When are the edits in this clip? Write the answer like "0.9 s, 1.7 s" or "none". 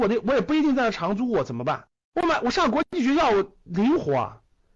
2.0 s